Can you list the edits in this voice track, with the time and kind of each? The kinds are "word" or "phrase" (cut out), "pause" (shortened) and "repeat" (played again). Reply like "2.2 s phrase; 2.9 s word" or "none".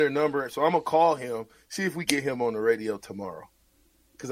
2.0 s word